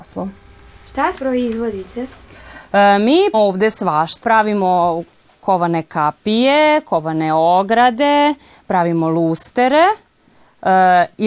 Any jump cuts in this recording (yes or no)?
yes